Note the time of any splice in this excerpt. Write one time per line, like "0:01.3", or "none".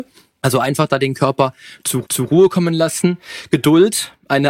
0:02.0